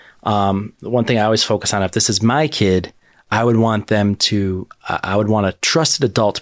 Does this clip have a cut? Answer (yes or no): no